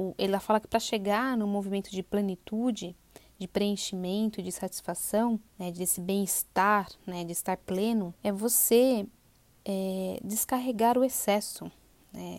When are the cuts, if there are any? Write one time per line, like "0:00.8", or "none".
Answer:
0:05.5
0:08.2

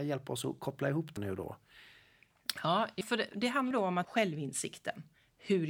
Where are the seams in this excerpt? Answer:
0:01.2
0:03.0
0:03.7
0:04.0

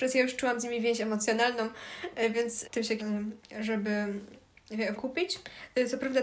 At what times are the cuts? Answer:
0:02.6
0:03.0
0:04.9

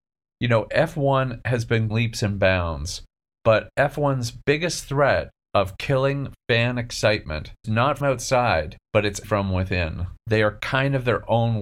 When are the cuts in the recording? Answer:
0:01.9
0:07.6
0:08.0
0:08.8
0:09.2
0:10.2

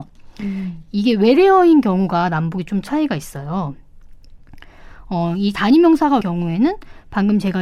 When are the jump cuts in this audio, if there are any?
0:06.2

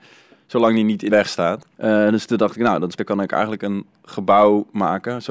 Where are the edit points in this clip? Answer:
0:01.1
0:01.7
0:03.0

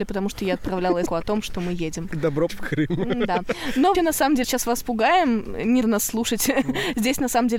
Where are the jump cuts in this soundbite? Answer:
0:01.1
0:02.5
0:03.9
0:04.4
0:05.8

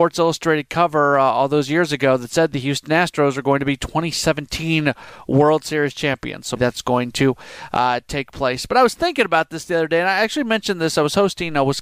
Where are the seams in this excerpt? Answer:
0:06.6

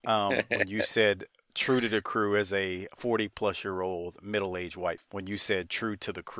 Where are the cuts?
0:05.0

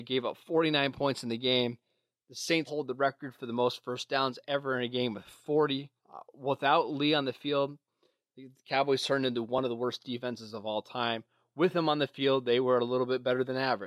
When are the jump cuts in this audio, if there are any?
0:02.7
0:06.0

